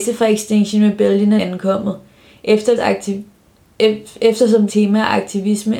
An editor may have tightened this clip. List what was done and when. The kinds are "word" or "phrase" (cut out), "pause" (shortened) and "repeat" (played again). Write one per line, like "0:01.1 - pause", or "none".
0:01.4 - word
0:02.8 - word
0:04.7 - word